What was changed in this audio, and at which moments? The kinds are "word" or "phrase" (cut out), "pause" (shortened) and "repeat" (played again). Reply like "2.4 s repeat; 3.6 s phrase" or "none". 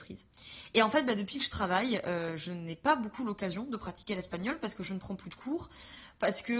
none

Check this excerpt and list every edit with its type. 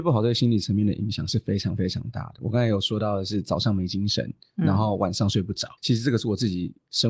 5.8 s pause

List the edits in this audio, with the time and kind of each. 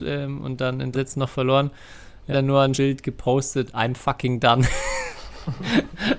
0.9 s word; 2.3 s word; 2.7 s word; 3.7 s word

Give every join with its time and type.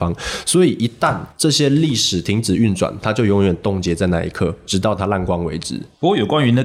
1.3 s pause

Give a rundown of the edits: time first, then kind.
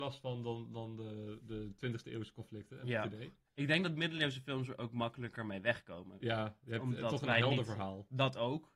none

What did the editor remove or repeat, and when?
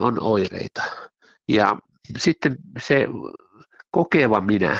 2.0 s pause

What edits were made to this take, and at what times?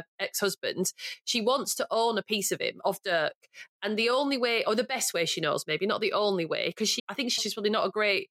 7.0 s word; 7.4 s word

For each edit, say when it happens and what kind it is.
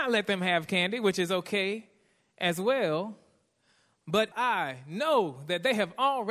4.3 s word

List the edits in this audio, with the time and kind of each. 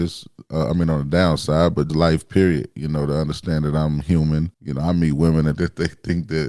1.9 s word; 4.5 s pause; 5.6 s phrase

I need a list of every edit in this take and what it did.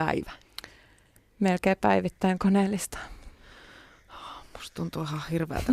2.4 s phrase

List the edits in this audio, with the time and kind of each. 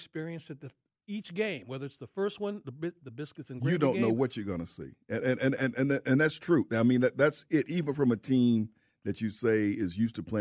none

